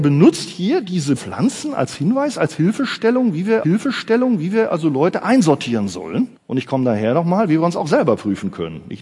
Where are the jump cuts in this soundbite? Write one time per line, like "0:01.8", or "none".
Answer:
0:01.2
0:03.6
0:06.4